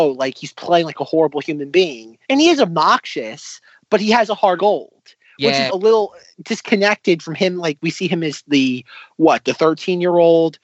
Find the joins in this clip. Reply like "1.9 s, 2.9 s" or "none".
2.2 s, 4.6 s, 5.7 s